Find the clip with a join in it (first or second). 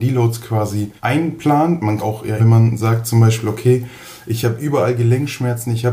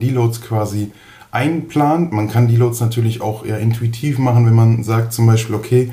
first